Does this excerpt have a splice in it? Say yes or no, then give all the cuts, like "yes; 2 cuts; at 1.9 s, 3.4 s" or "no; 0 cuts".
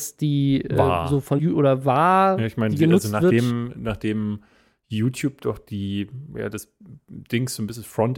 yes; 1 cut; at 1.4 s